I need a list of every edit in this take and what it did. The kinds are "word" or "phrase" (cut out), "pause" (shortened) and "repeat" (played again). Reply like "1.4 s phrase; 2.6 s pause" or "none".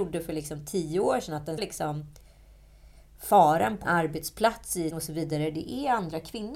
1.6 s word; 3.8 s word; 4.9 s word